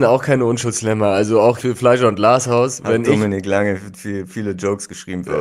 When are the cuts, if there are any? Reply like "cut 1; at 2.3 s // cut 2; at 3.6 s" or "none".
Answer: cut 1; at 1.6 s